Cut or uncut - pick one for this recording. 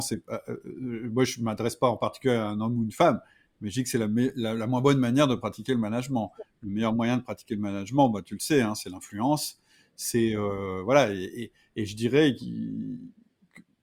uncut